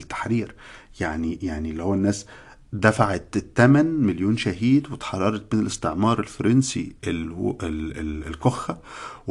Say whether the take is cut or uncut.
uncut